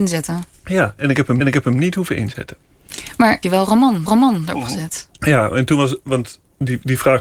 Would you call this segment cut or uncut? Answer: cut